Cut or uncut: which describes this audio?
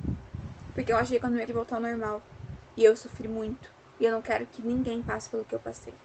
cut